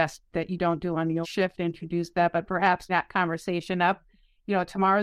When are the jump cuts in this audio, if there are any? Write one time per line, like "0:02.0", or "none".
0:01.2
0:01.6
0:02.9

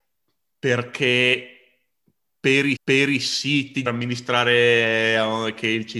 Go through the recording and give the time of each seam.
0:02.8
0:03.9

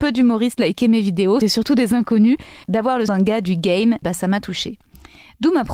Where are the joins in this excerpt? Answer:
0:01.4
0:02.6
0:03.1
0:04.0

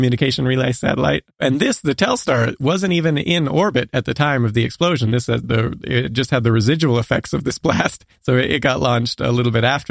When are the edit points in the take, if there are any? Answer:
0:05.4
0:08.1

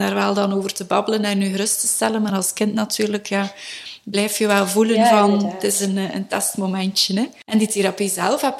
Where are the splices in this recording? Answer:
none

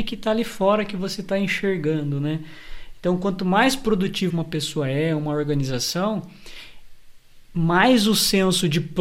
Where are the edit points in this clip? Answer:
0:04.3

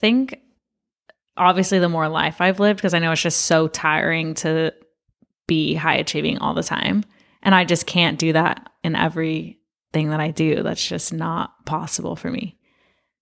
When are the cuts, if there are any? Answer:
none

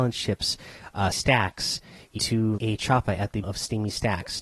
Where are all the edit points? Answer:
0:01.1
0:02.2
0:02.6
0:03.4

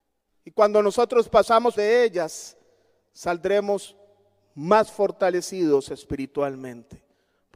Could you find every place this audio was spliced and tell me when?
0:01.7

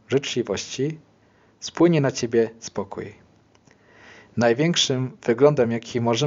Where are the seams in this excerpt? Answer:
none

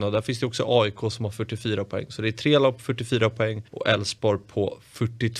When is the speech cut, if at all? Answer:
0:03.7

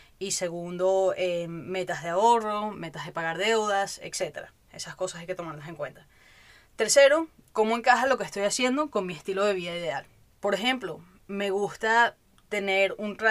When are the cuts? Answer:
none

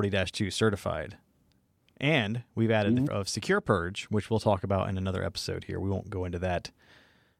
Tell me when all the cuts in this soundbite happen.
0:03.1

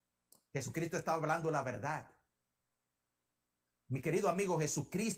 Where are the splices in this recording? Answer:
none

